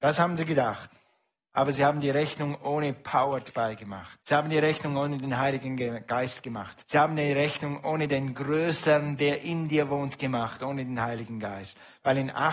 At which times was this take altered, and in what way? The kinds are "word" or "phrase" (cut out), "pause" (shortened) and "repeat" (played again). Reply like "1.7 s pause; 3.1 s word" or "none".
4.2 s pause; 6.8 s pause